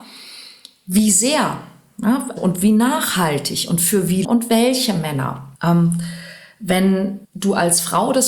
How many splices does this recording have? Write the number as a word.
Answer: four